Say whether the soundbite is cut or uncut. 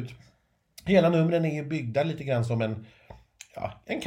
uncut